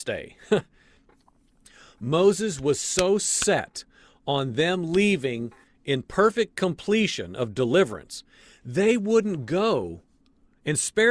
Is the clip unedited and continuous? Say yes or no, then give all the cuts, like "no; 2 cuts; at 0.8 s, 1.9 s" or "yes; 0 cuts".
yes; 0 cuts